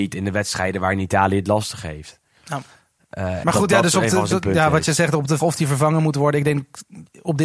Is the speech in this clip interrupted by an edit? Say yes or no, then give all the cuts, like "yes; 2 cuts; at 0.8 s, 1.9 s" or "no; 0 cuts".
yes; 3 cuts; at 3.4 s, 4.3 s, 5.4 s